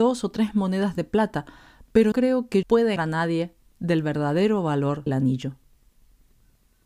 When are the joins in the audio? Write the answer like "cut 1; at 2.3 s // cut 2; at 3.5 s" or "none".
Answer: cut 1; at 2.1 s // cut 2; at 2.6 s // cut 3; at 3.0 s // cut 4; at 5.1 s